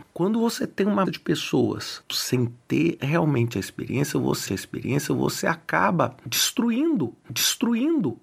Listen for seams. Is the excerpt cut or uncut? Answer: cut